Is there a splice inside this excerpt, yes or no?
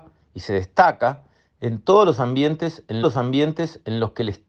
yes